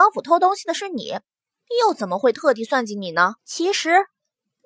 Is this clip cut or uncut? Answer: cut